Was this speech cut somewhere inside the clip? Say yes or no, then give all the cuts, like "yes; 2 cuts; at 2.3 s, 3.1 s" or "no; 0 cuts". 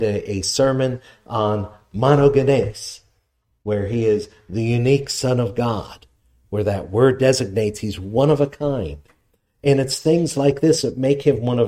no; 0 cuts